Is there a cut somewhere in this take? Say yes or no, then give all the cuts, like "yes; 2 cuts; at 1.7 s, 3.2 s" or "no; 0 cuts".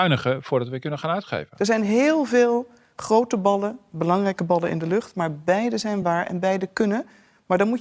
no; 0 cuts